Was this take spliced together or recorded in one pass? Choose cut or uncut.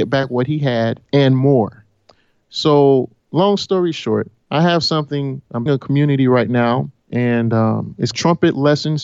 cut